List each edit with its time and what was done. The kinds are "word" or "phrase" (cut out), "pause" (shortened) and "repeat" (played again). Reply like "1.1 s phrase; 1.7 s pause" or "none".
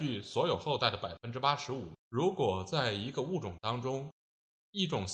2.0 s pause

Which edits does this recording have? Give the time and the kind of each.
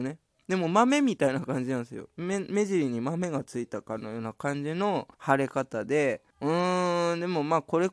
5.1 s pause; 6.3 s pause

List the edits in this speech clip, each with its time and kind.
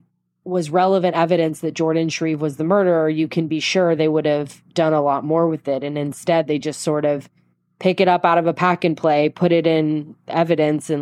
none

